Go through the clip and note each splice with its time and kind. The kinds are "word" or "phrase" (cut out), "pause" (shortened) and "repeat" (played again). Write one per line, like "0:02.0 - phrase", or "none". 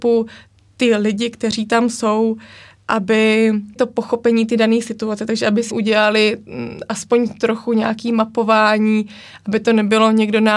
0:03.8 - word
0:05.7 - word